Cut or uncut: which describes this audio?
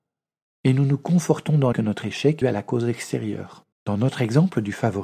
cut